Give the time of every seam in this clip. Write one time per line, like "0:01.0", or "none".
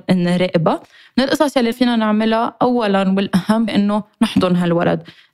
0:01.7
0:03.7

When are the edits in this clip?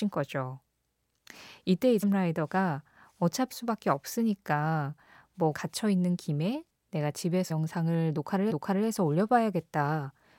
0:02.0
0:03.5
0:05.5
0:07.5
0:08.5

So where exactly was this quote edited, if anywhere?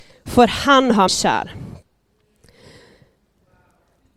0:01.1

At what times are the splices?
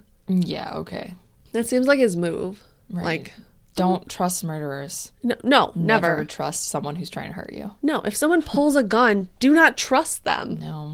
none

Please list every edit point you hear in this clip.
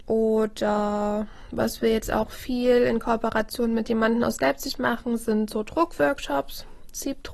none

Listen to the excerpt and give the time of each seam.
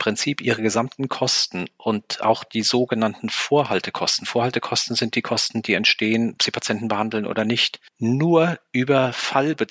0:07.9

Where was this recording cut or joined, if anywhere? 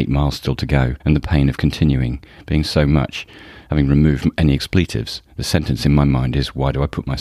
0:01.0

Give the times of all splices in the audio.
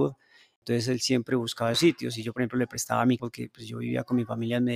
0:01.7
0:03.2

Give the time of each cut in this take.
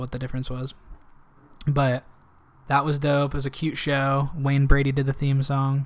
none

